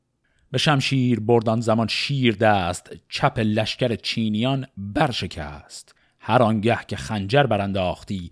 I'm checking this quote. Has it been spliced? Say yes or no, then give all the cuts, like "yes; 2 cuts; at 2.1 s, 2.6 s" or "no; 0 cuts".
no; 0 cuts